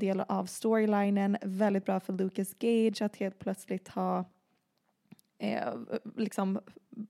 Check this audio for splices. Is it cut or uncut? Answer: uncut